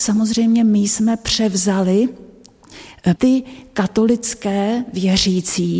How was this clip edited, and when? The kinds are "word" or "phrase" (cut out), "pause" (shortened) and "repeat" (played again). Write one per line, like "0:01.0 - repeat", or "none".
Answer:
0:03.2 - word